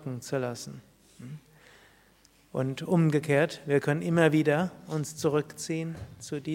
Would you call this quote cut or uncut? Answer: uncut